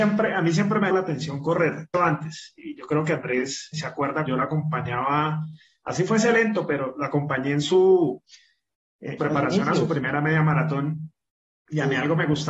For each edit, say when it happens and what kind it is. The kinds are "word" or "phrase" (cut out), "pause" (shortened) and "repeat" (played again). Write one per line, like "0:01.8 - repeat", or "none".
0:00.9 - word
0:01.9 - phrase
0:03.7 - word
0:04.3 - word
0:09.2 - phrase

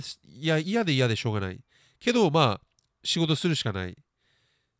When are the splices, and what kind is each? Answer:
none

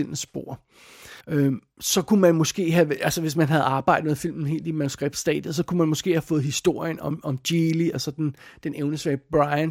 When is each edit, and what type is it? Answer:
0:01.2 - pause

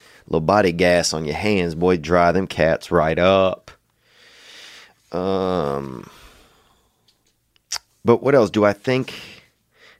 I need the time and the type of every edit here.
none

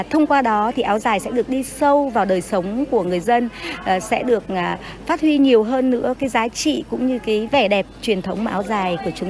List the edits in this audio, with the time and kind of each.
none

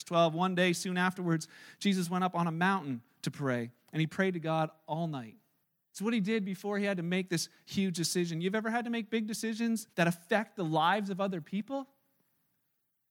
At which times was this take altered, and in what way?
0:05.6 - pause
0:09.9 - pause

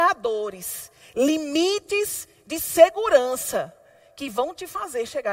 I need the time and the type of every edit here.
none

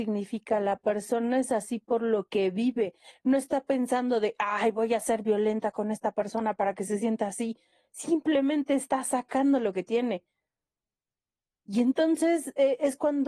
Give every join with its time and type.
none

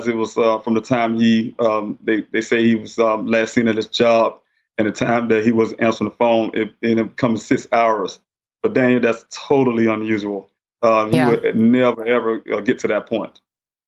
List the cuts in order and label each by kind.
none

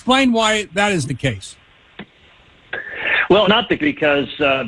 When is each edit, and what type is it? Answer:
0:01.0 - word
0:03.4 - word
0:03.8 - word

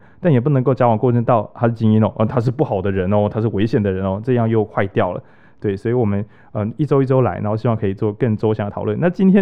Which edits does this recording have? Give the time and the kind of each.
none

